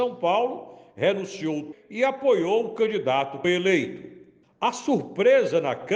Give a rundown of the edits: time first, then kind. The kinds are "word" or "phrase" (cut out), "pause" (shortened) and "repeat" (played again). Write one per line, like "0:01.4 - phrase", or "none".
0:01.7 - word
0:03.4 - word
0:04.4 - pause